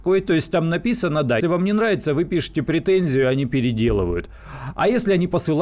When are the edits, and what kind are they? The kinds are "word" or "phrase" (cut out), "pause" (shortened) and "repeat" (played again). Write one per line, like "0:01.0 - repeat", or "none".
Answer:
0:01.4 - word